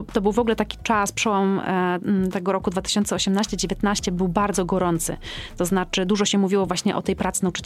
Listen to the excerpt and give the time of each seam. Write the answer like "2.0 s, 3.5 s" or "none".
none